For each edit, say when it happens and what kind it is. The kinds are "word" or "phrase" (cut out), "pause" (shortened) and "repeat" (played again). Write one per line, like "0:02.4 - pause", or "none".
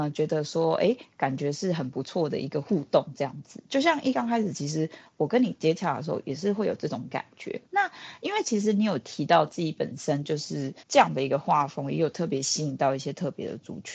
0:07.7 - pause
0:10.8 - pause